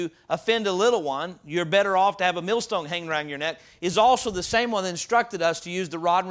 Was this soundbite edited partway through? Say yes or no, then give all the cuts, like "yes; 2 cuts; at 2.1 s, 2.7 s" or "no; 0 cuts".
no; 0 cuts